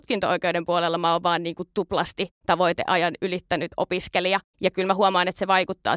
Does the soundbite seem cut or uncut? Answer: uncut